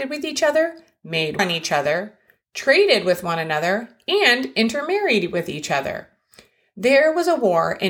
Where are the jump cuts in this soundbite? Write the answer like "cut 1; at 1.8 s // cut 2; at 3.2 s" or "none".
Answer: cut 1; at 1.4 s